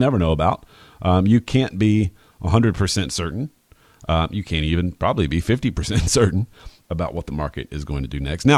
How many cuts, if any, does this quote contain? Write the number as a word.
zero